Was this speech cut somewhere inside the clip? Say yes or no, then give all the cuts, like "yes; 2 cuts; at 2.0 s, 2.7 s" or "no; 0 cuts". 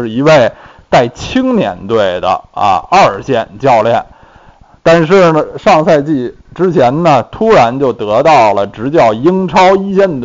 yes; 1 cut; at 6.5 s